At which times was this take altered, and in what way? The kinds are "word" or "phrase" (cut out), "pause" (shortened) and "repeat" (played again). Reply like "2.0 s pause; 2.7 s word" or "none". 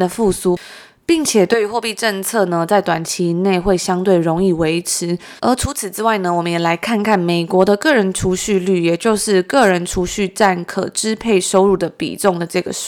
5.4 s pause